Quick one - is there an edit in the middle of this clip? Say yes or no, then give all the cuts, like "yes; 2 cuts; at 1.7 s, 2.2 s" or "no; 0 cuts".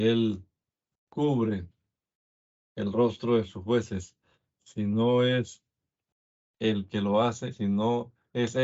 no; 0 cuts